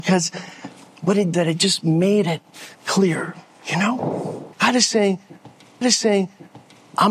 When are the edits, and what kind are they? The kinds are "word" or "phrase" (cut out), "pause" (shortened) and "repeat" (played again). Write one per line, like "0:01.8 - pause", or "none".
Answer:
0:01.3 - phrase
0:02.7 - pause
0:04.5 - pause
0:05.8 - repeat